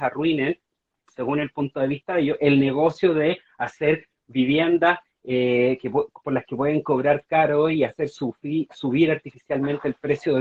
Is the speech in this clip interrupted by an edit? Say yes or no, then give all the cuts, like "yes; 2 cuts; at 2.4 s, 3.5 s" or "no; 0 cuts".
no; 0 cuts